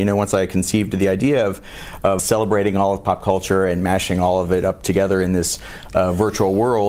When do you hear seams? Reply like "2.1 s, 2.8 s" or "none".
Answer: 2.2 s